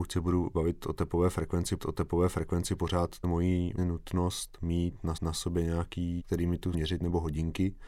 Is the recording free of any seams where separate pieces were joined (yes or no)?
no